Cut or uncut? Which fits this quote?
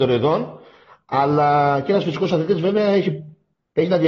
uncut